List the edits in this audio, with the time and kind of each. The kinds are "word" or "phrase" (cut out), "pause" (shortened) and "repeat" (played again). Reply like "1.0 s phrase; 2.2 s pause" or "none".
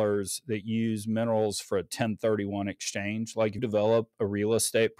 3.6 s word